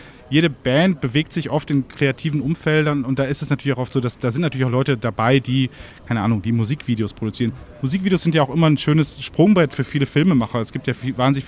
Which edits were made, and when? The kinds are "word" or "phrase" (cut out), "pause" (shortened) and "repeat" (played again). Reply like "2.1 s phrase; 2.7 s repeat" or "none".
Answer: none